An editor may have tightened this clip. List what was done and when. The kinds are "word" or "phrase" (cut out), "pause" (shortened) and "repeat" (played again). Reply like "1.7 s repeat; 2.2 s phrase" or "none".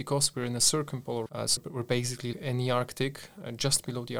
1.3 s word; 1.6 s word; 2.3 s word